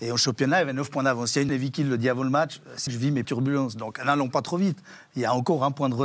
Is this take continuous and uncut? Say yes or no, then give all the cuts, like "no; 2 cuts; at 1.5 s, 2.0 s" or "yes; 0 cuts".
no; 3 cuts; at 1.5 s, 2.9 s, 3.2 s